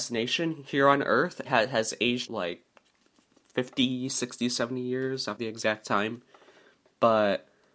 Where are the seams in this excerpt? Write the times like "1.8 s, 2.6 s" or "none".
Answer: 1.4 s, 2.3 s, 5.4 s